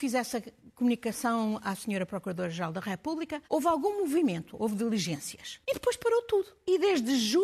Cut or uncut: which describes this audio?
cut